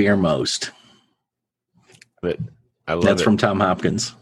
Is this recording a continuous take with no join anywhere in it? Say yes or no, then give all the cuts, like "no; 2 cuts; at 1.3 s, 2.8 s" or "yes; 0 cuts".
no; 1 cut; at 2.2 s